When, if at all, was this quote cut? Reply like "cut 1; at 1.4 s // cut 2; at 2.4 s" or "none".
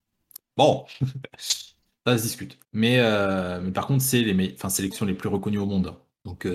cut 1; at 2.6 s // cut 2; at 4.9 s